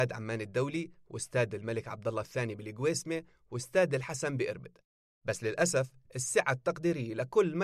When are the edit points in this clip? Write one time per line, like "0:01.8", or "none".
none